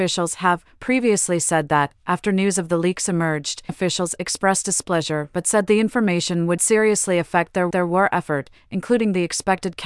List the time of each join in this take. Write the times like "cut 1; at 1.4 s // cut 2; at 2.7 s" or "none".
cut 1; at 3.7 s // cut 2; at 6.6 s // cut 3; at 7.7 s